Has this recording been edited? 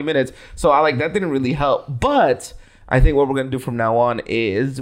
no; 0 cuts

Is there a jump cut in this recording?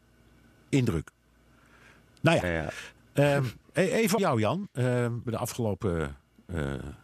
yes; 3 cuts; at 2.4 s, 4.2 s, 5.3 s

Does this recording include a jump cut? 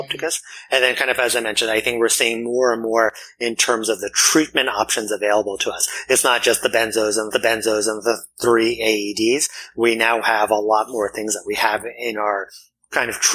yes; 1 cut; at 7.3 s

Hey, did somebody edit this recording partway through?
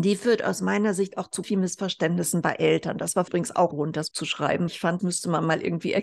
yes; 6 cuts; at 1.4 s, 3.3 s, 3.7 s, 4.1 s, 4.7 s, 5.0 s

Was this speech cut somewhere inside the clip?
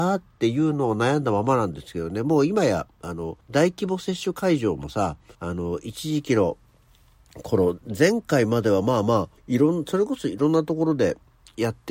yes; 3 cuts; at 3.4 s, 5.3 s, 9.4 s

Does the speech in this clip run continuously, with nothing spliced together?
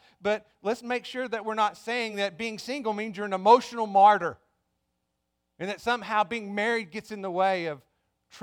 yes; 0 cuts

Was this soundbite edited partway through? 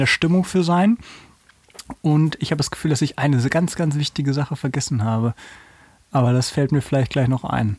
no; 0 cuts

